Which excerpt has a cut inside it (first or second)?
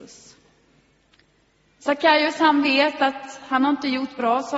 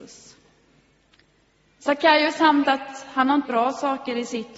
second